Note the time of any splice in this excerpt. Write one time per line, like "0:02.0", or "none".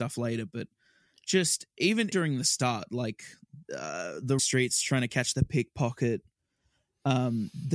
0:02.1
0:03.6
0:04.4